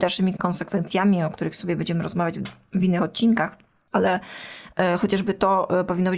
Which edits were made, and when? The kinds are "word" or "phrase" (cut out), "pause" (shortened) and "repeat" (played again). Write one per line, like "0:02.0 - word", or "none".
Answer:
none